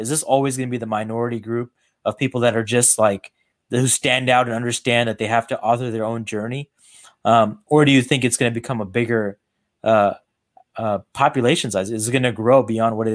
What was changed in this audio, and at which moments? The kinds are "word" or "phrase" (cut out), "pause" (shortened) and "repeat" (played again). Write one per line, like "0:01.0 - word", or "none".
none